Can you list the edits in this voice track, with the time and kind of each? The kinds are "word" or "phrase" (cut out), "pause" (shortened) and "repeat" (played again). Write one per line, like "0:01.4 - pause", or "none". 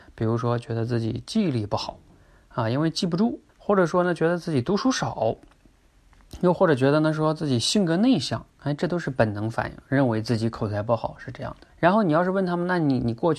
0:03.5 - pause
0:11.7 - pause